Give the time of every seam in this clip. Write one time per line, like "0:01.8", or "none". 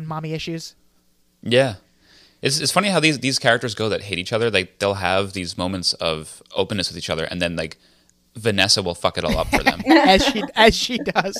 none